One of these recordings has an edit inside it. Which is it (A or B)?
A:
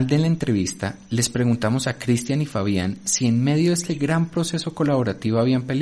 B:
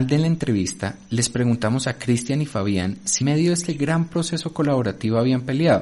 B